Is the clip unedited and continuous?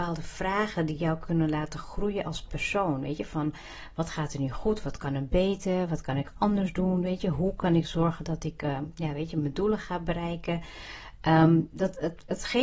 yes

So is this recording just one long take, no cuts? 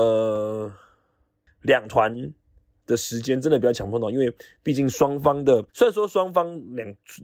no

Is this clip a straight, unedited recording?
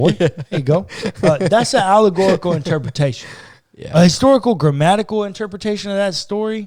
yes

